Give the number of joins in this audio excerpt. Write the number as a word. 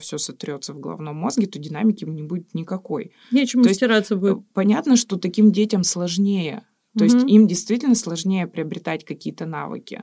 zero